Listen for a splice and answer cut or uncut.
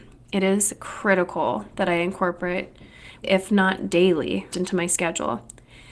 cut